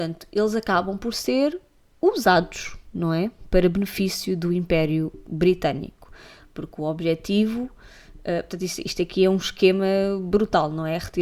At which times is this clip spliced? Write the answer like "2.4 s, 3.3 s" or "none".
none